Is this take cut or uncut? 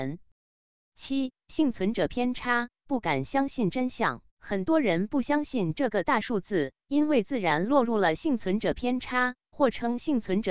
cut